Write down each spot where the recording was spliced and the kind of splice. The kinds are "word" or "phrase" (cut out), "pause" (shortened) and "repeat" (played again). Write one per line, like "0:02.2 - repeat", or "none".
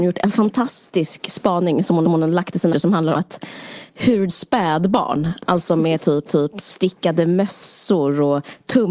0:02.0 - repeat
0:02.7 - word
0:03.1 - word
0:04.3 - phrase
0:06.3 - repeat